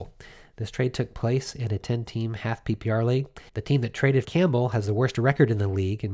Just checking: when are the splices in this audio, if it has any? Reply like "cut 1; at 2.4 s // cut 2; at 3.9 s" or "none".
cut 1; at 3.5 s // cut 2; at 4.2 s